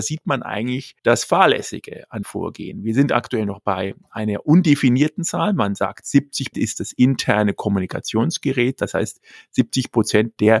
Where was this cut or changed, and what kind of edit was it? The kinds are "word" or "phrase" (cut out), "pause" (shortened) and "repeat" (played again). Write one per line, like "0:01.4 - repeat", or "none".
0:01.0 - pause
0:02.2 - word
0:06.5 - word